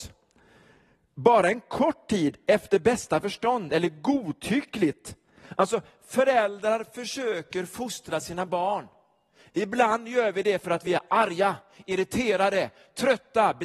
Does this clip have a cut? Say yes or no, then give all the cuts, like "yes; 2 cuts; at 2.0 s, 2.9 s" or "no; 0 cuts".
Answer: no; 0 cuts